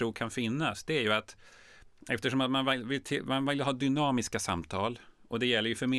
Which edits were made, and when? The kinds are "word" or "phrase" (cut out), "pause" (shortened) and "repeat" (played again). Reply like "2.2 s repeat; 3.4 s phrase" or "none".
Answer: none